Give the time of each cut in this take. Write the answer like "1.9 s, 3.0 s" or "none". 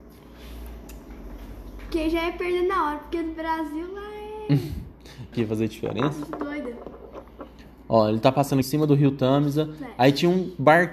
5.3 s, 8.6 s

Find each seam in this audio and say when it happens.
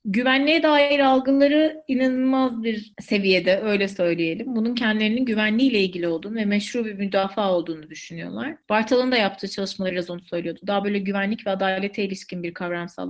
none

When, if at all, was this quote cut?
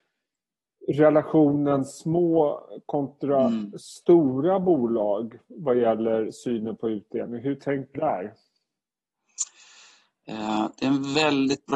8.0 s

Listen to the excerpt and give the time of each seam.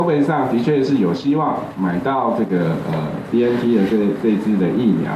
none

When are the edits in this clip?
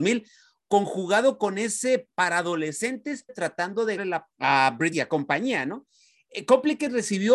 2.1 s, 3.3 s, 4.0 s, 4.3 s, 4.9 s

